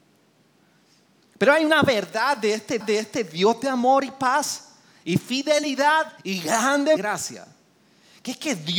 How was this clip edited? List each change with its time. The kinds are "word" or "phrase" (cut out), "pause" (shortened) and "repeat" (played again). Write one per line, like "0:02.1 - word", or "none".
0:02.8 - repeat
0:06.2 - pause
0:07.0 - phrase